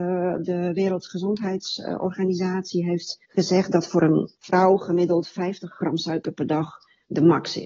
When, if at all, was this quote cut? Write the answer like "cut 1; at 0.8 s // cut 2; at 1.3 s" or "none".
cut 1; at 3.2 s // cut 2; at 4.4 s